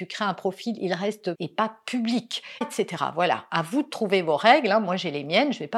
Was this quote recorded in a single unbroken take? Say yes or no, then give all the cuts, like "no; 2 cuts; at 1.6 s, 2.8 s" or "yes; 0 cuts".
no; 2 cuts; at 1.3 s, 2.6 s